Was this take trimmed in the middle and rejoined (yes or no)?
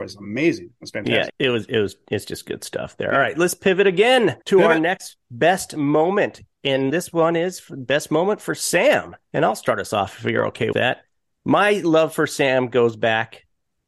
yes